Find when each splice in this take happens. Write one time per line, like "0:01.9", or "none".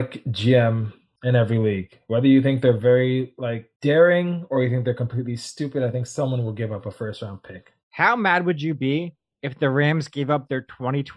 0:07.8